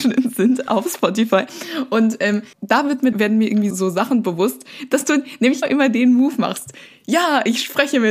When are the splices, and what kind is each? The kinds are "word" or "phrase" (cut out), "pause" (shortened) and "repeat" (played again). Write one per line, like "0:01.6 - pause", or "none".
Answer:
0:02.5 - pause
0:03.1 - phrase
0:03.7 - word
0:05.6 - word